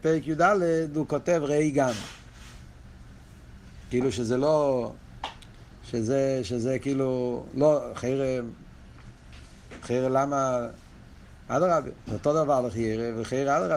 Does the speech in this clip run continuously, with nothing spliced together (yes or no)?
yes